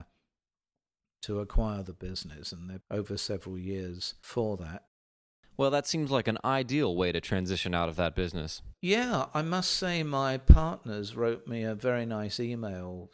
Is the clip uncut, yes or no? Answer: no